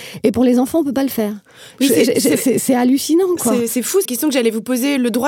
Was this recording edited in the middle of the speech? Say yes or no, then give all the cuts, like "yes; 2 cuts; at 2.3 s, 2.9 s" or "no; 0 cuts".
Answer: yes; 1 cut; at 4.0 s